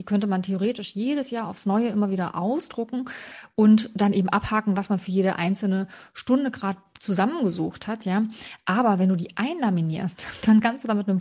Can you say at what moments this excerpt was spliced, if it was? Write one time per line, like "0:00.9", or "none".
none